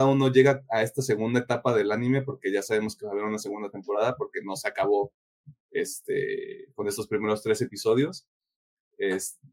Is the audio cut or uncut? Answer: uncut